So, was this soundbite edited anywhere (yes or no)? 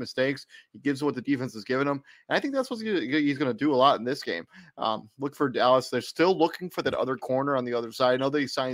no